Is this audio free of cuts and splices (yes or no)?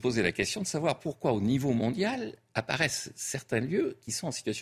yes